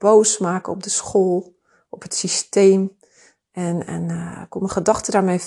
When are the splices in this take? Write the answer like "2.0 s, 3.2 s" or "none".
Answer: none